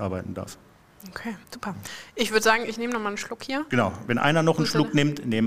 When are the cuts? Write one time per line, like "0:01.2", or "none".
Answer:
0:01.4